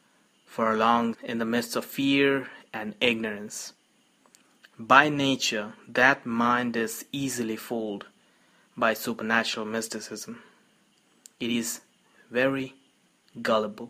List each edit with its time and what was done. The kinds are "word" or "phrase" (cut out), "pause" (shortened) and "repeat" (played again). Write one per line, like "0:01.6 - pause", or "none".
0:01.1 - word